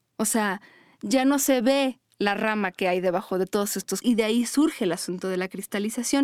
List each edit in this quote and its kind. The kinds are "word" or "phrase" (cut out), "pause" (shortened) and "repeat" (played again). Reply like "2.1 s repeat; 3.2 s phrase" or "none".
4.0 s word